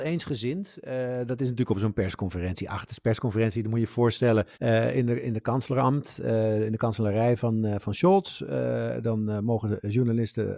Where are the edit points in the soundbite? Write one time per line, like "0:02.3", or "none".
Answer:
0:04.5